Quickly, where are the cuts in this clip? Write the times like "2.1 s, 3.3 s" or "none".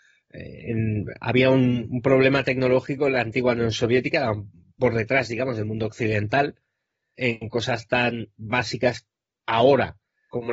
none